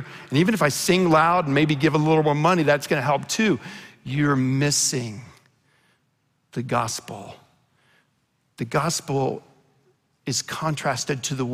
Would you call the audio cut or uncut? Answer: uncut